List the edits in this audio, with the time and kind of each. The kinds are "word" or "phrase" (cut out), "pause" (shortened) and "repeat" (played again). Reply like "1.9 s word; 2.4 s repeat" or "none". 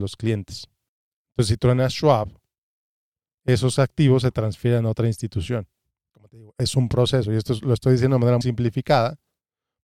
8.4 s word